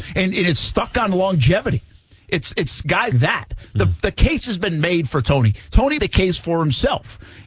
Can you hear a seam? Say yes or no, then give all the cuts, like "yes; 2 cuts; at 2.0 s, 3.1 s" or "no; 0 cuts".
yes; 2 cuts; at 3.1 s, 6.0 s